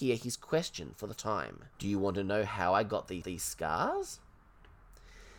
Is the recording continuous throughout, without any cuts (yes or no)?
no